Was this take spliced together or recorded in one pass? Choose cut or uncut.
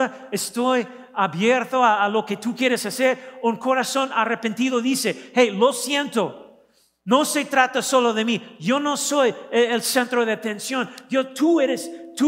uncut